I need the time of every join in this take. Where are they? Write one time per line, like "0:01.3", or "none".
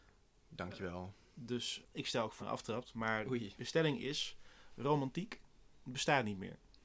0:01.8
0:02.4